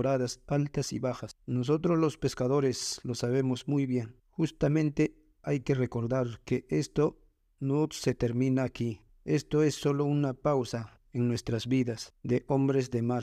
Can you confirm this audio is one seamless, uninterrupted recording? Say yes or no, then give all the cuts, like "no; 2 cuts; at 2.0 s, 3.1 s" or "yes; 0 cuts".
yes; 0 cuts